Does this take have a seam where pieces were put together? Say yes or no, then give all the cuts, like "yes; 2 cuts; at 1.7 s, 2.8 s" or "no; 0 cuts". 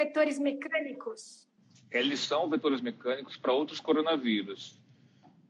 no; 0 cuts